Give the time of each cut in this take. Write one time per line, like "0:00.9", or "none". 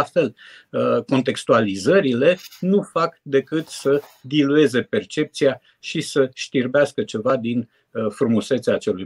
none